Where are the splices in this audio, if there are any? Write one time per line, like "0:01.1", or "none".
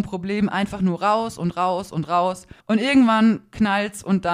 0:02.6

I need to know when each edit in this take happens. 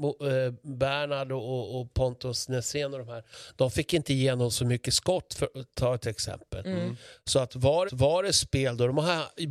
0:07.9

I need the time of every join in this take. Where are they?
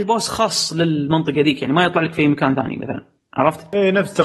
none

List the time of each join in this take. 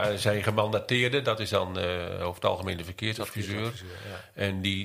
none

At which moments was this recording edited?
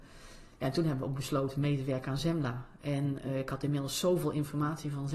none

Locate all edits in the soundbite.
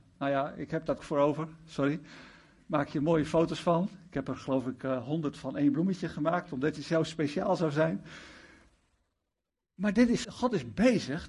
0:01.0
0:10.2

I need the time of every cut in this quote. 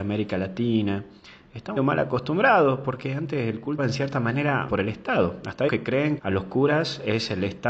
0:01.8
0:03.8
0:04.7
0:05.7
0:06.2

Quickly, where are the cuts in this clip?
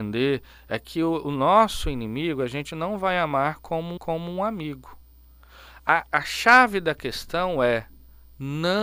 0:04.0
0:06.1

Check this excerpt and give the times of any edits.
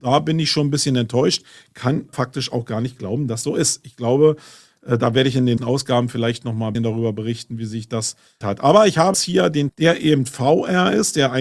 0:02.1
0:03.4
0:05.6
0:06.7
0:08.4
0:09.1
0:09.7

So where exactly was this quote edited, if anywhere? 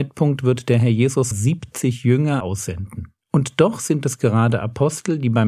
0:01.3
0:02.4
0:03.2

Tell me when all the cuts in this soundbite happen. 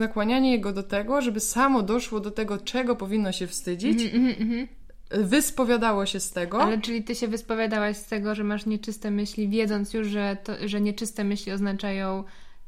0:04.4

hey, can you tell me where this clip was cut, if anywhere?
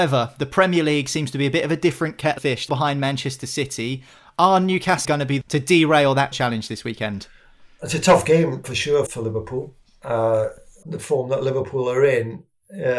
0:02.4
0:02.7
0:05.0
0:05.4
0:06.3
0:08.6
0:09.1
0:10.8

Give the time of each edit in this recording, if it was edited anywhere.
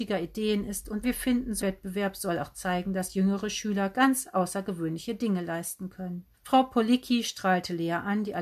0:01.0
0:01.6
0:06.3

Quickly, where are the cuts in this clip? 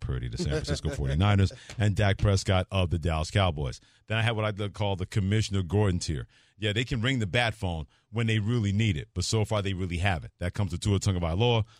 none

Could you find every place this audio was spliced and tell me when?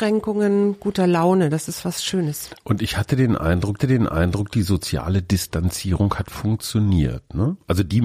0:03.8

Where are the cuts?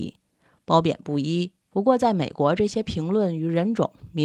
0:01.7

